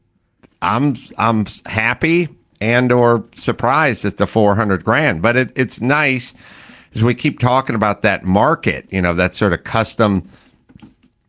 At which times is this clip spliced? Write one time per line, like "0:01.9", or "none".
none